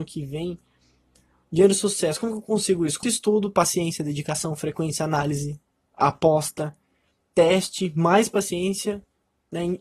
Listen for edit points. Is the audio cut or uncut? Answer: cut